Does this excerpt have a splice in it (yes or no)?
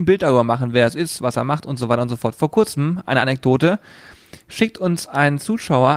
no